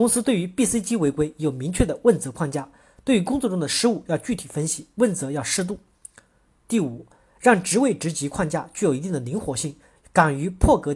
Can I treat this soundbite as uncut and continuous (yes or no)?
yes